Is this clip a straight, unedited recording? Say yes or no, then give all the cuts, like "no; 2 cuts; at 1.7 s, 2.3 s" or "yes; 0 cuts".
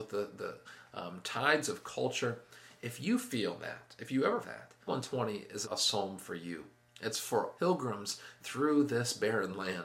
no; 4 cuts; at 4.4 s, 4.9 s, 5.6 s, 7.6 s